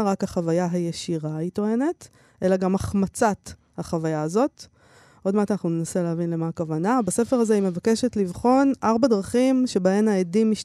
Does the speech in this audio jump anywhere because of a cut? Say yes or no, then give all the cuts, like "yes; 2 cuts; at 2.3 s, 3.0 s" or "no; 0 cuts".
no; 0 cuts